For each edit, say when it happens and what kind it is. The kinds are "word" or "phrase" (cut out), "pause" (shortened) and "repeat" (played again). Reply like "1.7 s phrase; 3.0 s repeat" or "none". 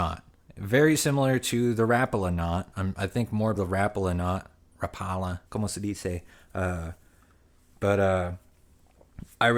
2.7 s pause; 3.6 s phrase; 5.5 s pause; 6.3 s pause